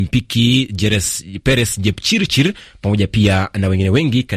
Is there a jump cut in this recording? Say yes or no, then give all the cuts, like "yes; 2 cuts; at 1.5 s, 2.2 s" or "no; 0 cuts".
no; 0 cuts